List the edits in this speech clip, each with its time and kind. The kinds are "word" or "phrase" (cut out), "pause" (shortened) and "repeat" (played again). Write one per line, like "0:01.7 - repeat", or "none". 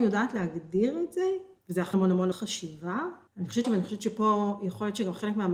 0:01.6 - pause
0:01.9 - word
0:02.3 - word
0:03.3 - pause
0:03.6 - word